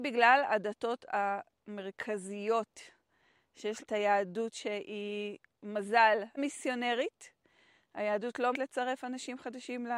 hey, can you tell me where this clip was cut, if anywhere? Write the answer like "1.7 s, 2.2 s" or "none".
3.8 s, 6.4 s, 8.5 s